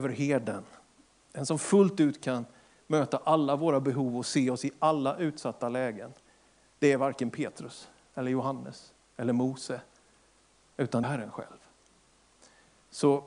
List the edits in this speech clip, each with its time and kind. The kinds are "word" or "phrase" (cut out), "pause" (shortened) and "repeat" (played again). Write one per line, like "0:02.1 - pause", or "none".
0:11.0 - phrase